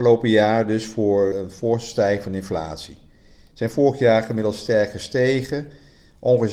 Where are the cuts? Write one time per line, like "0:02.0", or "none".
0:01.3